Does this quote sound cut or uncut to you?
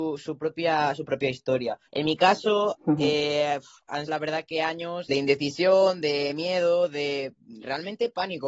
cut